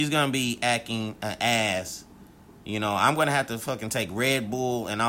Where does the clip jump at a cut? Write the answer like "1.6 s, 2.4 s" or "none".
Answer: none